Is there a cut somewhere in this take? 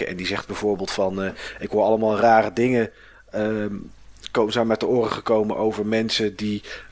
no; 0 cuts

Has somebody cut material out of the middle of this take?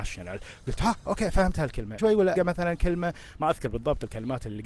yes; 2 cuts; at 2.0 s, 2.4 s

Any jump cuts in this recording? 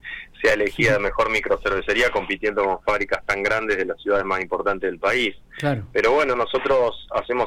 no; 0 cuts

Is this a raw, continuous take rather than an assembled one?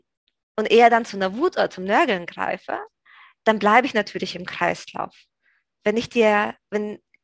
yes; 0 cuts

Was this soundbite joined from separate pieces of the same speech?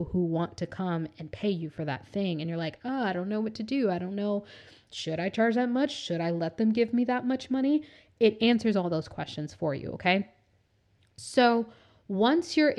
no; 0 cuts

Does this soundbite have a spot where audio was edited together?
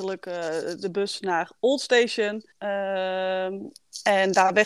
yes; 1 cut; at 2.5 s

